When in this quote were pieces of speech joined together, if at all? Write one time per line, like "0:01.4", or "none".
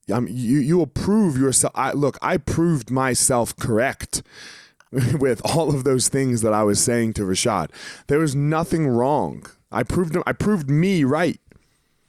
none

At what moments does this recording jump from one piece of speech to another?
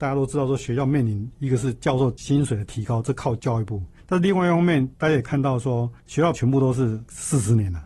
0:06.3

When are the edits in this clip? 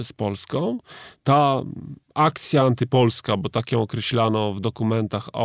none

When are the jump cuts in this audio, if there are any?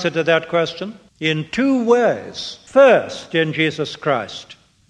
0:01.1
0:02.7

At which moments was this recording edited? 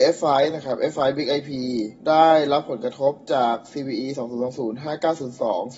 0:02.0

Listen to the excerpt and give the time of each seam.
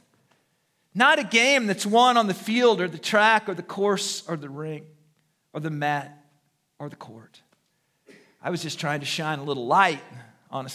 none

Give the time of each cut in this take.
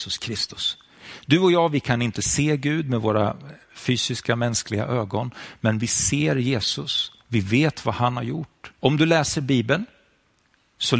0:07.2
0:08.8

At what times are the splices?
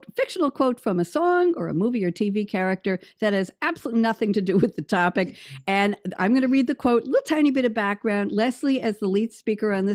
none

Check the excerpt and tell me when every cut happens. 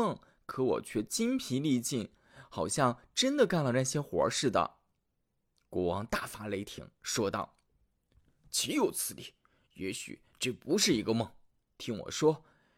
none

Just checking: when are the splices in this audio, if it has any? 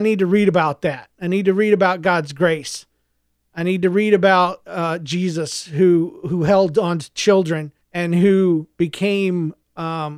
0:07.8

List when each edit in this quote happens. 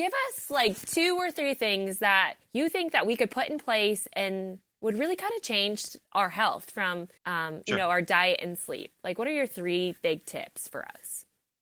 0:02.4
0:06.0
0:07.2

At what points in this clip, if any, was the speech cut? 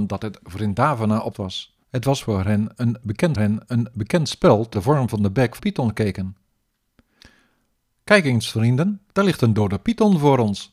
0:01.3
0:01.8
0:03.3
0:04.7
0:05.6
0:09.1

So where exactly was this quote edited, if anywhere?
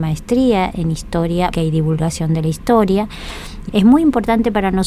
0:01.5
0:03.7

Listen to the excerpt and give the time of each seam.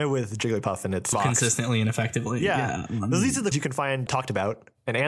0:01.1
0:03.5
0:04.1

